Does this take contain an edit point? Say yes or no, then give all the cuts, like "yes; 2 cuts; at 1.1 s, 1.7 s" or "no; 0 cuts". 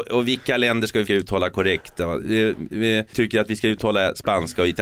yes; 2 cuts; at 1.1 s, 3.1 s